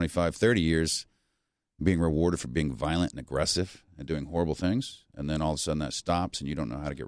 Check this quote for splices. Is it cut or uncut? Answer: uncut